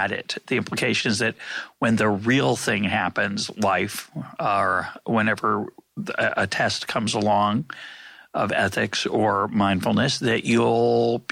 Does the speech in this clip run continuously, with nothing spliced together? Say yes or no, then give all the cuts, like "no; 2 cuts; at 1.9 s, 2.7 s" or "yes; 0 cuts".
yes; 0 cuts